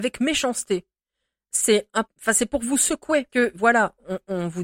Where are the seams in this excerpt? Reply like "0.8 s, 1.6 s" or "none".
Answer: 2.0 s, 3.3 s